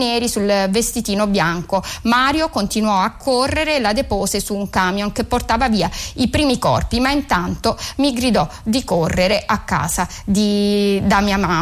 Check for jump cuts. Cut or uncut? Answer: uncut